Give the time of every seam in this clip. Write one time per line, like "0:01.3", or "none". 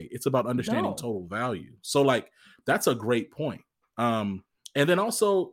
none